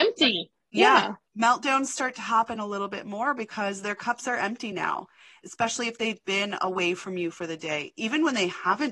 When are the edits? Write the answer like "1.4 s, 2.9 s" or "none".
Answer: none